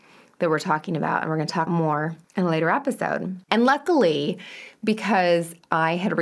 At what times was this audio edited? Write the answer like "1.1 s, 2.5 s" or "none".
1.7 s, 2.2 s, 3.4 s